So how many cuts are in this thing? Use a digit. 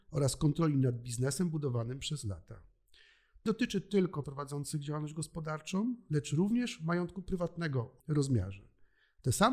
3